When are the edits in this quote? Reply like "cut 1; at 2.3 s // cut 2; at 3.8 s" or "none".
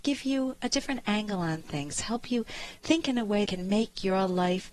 cut 1; at 3.5 s

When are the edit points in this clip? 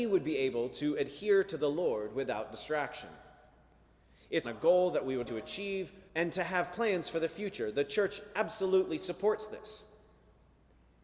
cut 1; at 4.4 s // cut 2; at 5.3 s // cut 3; at 6.1 s

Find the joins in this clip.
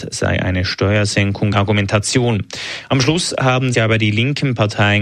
cut 1; at 1.5 s // cut 2; at 3.7 s

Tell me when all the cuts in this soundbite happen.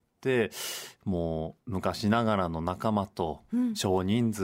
cut 1; at 1.6 s

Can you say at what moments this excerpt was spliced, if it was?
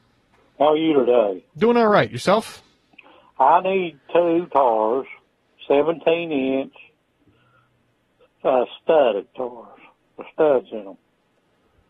none

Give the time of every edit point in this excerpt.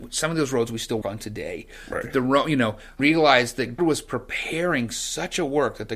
cut 1; at 1.0 s // cut 2; at 3.0 s // cut 3; at 3.8 s

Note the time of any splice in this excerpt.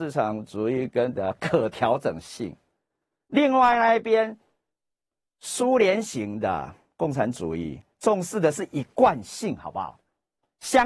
cut 1; at 1.1 s

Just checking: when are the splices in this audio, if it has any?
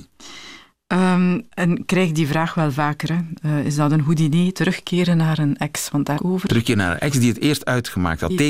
cut 1; at 6.2 s

